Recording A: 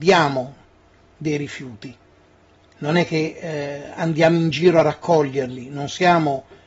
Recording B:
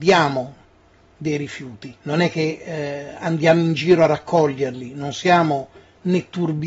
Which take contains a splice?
B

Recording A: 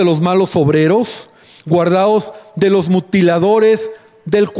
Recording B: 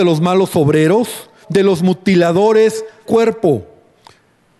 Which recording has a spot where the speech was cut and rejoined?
B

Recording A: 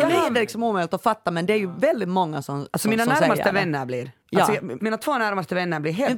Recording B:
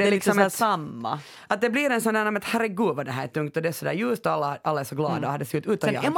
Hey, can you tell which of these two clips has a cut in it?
A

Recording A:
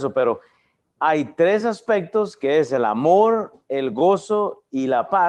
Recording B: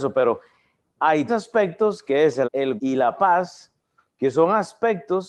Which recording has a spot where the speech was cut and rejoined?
B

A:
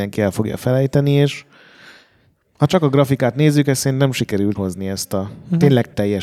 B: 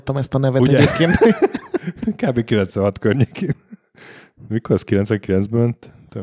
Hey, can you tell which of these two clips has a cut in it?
A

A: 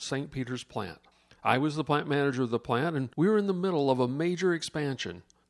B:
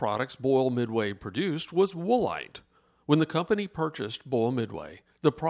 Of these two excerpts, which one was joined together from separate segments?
A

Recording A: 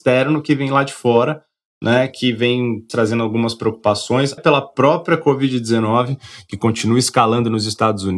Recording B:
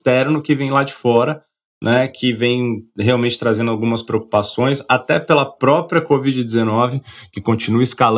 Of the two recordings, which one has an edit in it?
A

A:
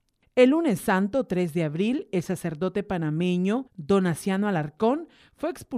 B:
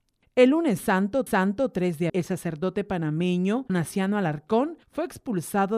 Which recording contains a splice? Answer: B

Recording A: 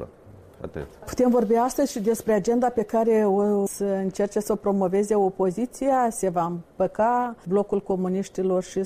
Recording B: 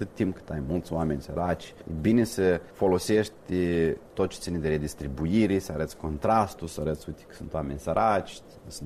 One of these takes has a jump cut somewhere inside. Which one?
B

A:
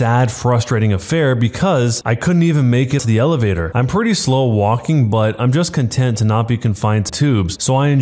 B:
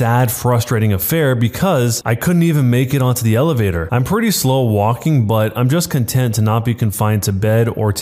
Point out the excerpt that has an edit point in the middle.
A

